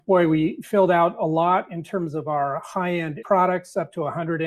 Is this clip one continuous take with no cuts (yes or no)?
no